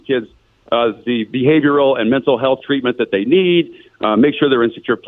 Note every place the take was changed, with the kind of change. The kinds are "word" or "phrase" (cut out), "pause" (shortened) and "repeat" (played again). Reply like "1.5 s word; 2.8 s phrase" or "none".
none